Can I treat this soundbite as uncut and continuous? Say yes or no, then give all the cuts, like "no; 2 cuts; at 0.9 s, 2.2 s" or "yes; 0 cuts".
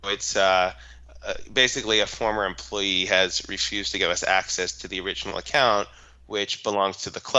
yes; 0 cuts